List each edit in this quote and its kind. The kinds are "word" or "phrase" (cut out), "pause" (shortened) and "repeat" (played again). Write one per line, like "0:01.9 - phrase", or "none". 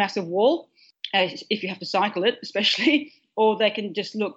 none